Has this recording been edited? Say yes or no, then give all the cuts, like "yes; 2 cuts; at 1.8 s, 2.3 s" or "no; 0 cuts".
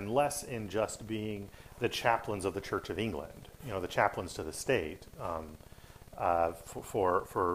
no; 0 cuts